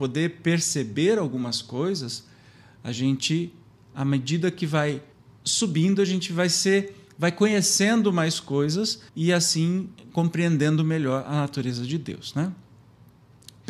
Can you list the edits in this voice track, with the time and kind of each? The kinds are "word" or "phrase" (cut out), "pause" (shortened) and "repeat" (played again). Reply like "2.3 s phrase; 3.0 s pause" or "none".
5.1 s pause; 9.1 s pause